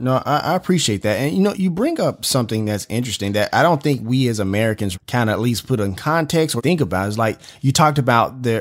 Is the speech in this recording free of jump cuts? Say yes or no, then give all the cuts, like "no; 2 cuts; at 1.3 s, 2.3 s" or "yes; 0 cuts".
no; 3 cuts; at 1.5 s, 4.9 s, 6.6 s